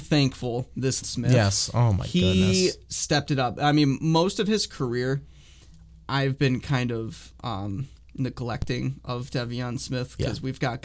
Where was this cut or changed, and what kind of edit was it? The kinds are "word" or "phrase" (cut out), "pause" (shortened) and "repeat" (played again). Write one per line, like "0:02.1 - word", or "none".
0:01.0 - phrase
0:08.0 - pause